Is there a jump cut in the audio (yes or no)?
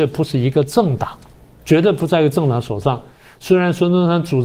no